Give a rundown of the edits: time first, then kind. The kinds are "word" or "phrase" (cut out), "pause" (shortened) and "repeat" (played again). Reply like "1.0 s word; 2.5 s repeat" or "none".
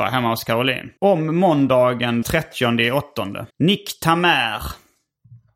1.0 s pause; 2.2 s word; 3.5 s pause